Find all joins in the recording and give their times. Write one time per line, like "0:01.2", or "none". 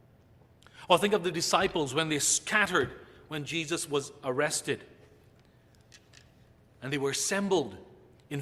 none